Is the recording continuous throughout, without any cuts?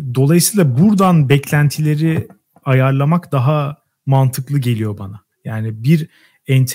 yes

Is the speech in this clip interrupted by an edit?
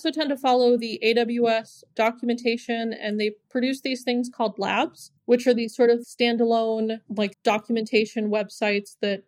yes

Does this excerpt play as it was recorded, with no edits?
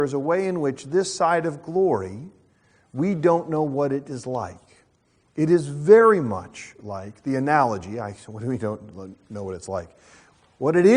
yes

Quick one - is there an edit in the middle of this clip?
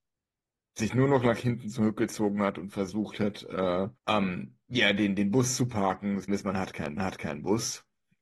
yes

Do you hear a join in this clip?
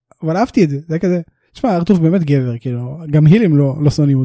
no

